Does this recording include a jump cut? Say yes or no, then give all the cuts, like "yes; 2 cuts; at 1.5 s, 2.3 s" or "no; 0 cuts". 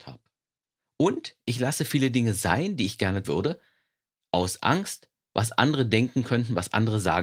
yes; 1 cut; at 3.2 s